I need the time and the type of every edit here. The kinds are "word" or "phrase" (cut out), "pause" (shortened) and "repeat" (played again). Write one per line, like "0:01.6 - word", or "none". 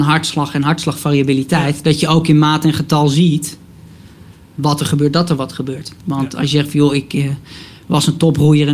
0:06.0 - pause